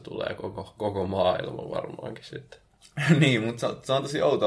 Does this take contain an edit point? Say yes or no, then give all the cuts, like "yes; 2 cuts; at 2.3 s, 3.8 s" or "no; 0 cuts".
no; 0 cuts